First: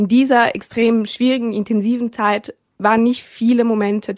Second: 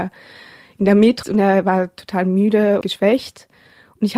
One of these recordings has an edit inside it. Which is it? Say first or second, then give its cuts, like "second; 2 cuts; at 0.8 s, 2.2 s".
second; 2 cuts; at 1.2 s, 2.8 s